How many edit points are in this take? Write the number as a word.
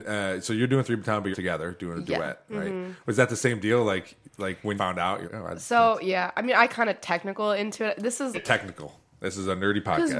five